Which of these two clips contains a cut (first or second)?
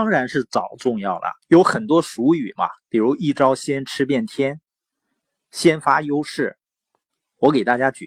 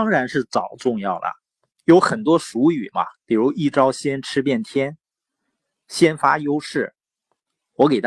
first